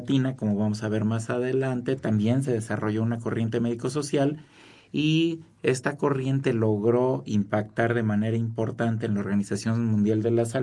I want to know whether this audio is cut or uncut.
uncut